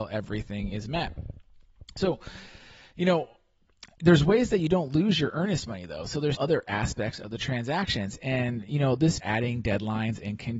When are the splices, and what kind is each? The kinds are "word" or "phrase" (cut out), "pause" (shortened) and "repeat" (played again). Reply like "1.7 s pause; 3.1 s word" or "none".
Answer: 3.9 s pause; 6.3 s word; 9.2 s word